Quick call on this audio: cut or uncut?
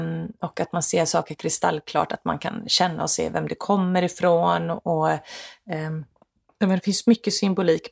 uncut